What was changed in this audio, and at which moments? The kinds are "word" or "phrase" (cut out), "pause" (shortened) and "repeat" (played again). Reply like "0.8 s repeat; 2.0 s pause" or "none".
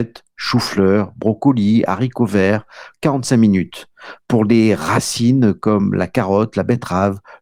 2.9 s word